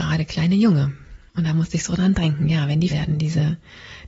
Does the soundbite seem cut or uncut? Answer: cut